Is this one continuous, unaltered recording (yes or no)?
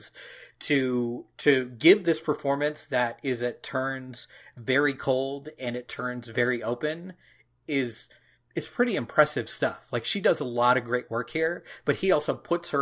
yes